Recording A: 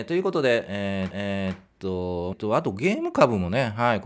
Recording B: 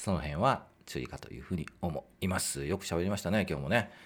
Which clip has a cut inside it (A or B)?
A